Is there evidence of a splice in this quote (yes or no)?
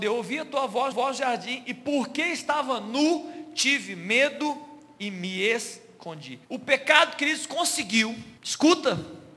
yes